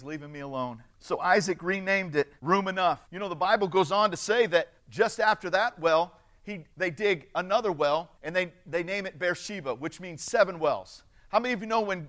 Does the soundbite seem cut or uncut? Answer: cut